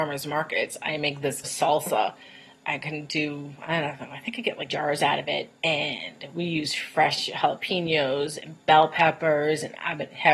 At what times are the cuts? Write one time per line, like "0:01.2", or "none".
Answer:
0:01.4
0:04.7
0:05.6